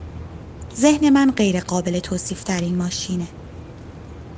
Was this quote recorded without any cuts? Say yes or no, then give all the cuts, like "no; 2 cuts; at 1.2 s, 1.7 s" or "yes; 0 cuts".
yes; 0 cuts